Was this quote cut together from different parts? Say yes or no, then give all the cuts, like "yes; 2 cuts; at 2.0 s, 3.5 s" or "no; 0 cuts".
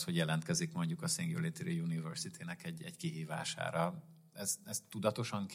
no; 0 cuts